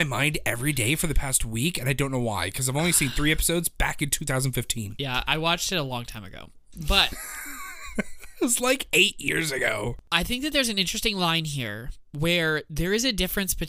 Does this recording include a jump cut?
no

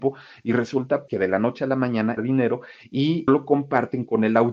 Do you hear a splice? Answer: yes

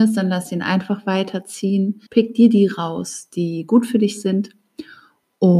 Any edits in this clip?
yes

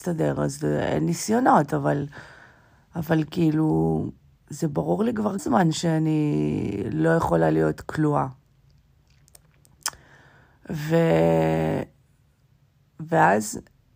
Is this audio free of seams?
no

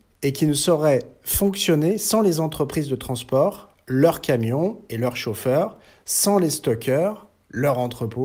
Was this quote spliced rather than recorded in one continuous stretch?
no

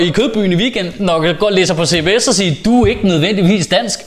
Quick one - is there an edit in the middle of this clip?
no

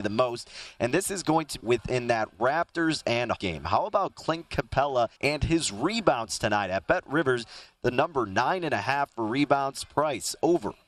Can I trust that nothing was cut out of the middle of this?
no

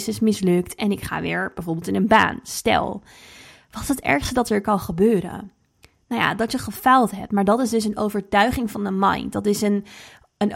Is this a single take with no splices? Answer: yes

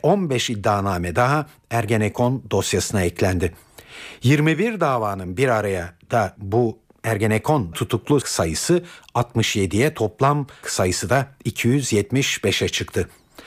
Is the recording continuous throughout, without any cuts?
no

